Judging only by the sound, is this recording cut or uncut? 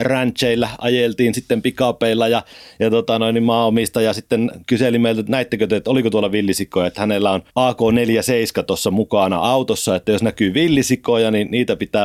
cut